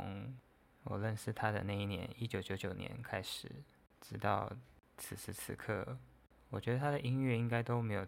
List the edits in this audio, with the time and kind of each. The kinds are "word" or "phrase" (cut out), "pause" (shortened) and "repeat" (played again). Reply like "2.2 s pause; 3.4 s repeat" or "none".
none